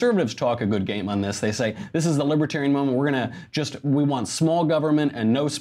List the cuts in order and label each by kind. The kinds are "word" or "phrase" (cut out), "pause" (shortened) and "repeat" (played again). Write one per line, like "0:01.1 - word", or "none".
none